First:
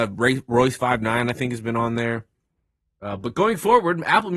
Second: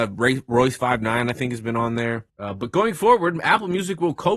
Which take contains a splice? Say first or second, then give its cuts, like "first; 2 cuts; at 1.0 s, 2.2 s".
second; 1 cut; at 2.3 s